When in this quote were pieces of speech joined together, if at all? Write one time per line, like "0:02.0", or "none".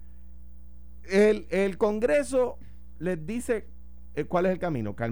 none